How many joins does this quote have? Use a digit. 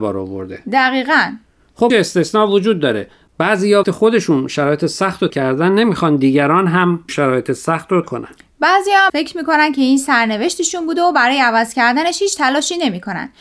6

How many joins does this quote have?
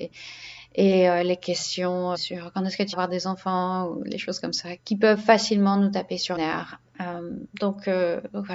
5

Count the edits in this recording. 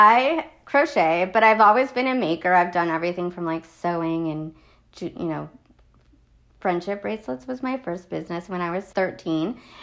0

